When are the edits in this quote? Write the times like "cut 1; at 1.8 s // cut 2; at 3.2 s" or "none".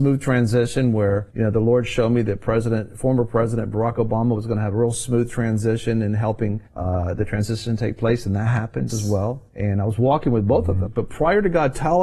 cut 1; at 1.3 s // cut 2; at 6.7 s // cut 3; at 8.9 s // cut 4; at 9.5 s // cut 5; at 10.9 s